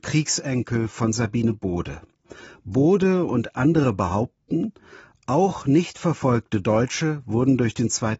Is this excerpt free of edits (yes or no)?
yes